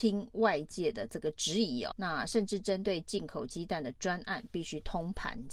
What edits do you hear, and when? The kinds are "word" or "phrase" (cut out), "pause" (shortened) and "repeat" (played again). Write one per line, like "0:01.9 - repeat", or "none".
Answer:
0:01.9 - word